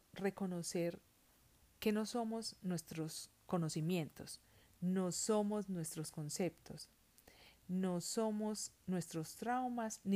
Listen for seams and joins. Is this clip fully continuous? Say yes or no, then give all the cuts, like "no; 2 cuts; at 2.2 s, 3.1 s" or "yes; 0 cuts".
yes; 0 cuts